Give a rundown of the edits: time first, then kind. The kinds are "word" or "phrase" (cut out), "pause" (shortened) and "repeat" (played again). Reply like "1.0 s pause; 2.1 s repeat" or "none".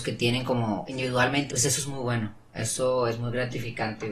1.5 s phrase